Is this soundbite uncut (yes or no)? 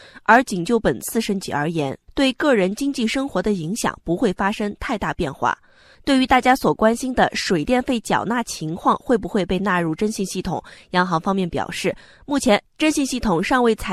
yes